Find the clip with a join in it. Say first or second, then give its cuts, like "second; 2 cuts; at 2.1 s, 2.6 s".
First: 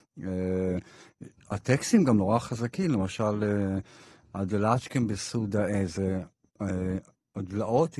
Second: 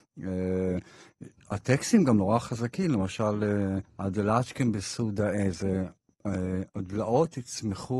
second; 2 cuts; at 3.8 s, 6.7 s